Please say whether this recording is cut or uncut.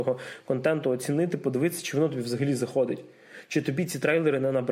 uncut